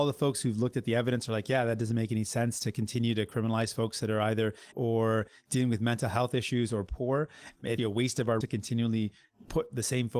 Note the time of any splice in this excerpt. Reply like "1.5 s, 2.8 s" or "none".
4.7 s, 7.8 s, 8.4 s